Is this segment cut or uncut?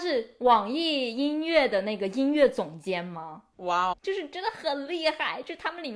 cut